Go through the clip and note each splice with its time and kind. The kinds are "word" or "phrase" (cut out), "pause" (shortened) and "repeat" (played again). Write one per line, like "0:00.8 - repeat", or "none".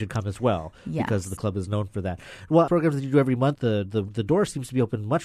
0:01.4 - word
0:02.7 - phrase
0:03.5 - phrase